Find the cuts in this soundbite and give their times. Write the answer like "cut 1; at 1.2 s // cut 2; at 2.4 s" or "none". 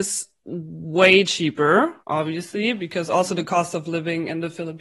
cut 1; at 2.0 s